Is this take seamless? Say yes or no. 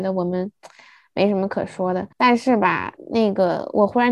no